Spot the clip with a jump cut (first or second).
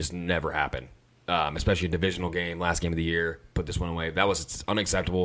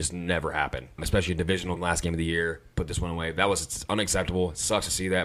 second